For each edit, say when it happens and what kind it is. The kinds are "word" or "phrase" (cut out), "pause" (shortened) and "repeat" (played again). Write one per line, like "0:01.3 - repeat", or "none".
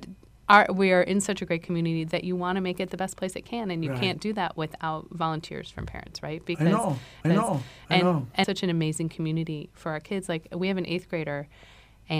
0:07.2 - repeat
0:08.4 - phrase